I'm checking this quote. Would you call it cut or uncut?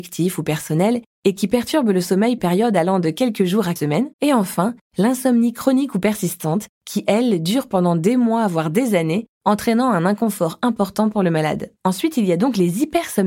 cut